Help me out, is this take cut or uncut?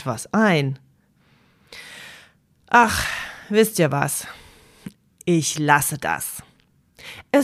uncut